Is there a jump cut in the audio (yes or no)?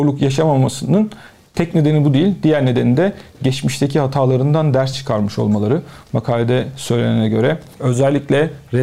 no